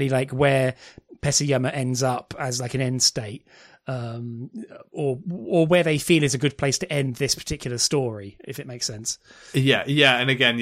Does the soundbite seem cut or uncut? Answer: uncut